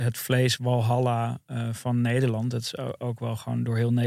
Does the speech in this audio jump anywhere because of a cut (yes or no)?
no